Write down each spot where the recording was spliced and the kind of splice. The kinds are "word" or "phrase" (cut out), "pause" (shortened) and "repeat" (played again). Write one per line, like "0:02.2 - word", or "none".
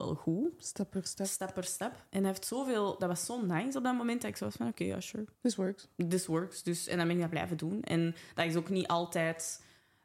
0:05.3 - pause